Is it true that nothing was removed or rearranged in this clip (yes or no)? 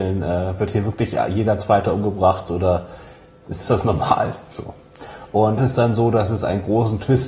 no